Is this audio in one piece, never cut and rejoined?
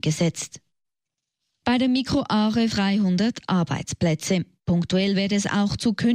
no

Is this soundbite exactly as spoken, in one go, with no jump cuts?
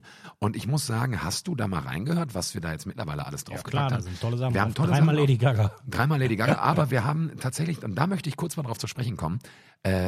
yes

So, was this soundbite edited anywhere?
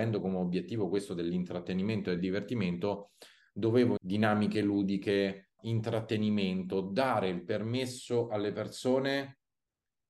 yes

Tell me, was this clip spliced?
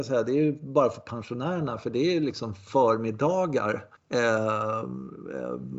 yes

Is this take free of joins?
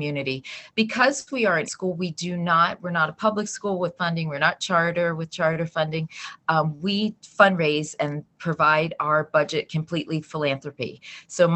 no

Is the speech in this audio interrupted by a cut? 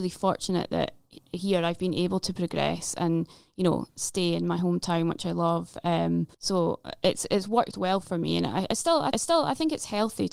yes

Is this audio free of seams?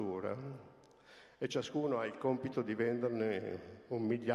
yes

